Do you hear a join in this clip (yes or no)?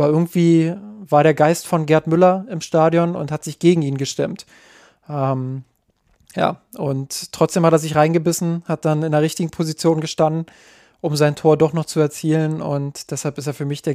no